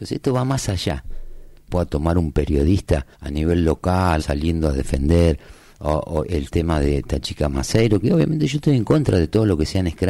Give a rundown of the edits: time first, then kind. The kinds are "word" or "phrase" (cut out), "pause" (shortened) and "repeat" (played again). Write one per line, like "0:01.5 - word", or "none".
0:01.7 - phrase
0:03.1 - pause
0:04.2 - word
0:05.7 - word